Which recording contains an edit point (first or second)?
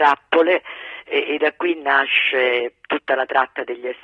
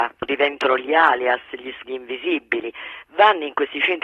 second